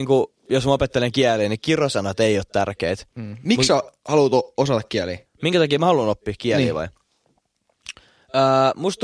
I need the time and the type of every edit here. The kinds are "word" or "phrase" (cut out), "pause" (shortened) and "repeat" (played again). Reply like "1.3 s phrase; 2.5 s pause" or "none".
5.3 s pause

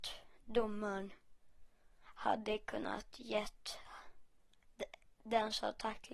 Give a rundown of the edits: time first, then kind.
none

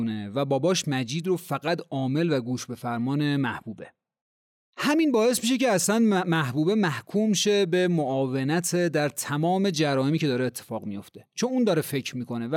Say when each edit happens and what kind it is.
4.4 s pause

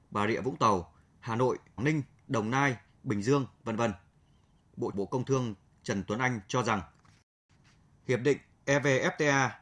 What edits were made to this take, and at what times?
1.8 s word; 4.9 s word

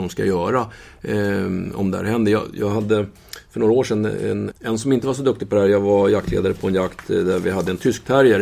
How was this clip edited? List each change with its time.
4.5 s word

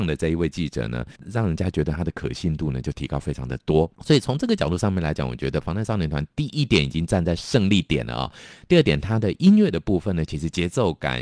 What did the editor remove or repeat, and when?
1.2 s pause; 3.9 s pause

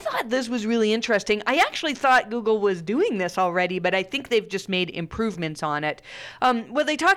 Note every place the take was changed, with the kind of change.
none

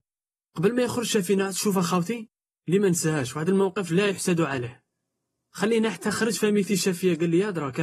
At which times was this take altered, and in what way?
none

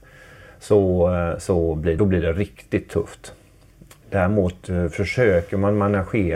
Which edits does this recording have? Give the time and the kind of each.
2.0 s phrase

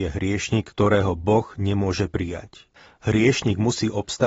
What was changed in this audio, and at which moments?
2.7 s pause

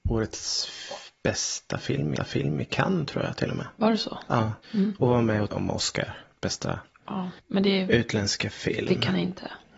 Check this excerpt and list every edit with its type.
2.2 s repeat; 5.5 s word

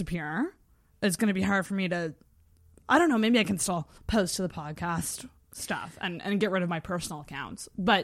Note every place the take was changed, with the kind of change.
4.0 s pause

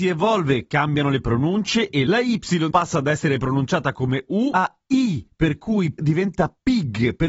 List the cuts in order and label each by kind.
6.0 s word

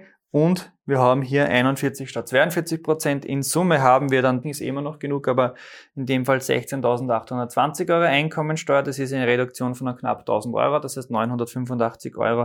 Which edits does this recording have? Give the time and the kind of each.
4.4 s phrase

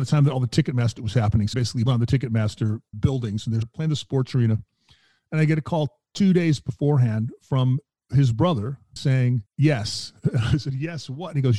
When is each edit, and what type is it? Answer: 1.0 s word; 1.5 s word; 1.9 s word; 2.9 s word; 3.6 s word; 9.0 s word

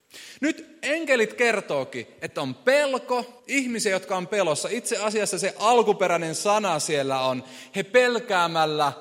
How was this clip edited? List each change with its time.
3.4 s pause

